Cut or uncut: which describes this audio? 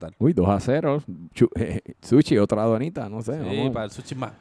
uncut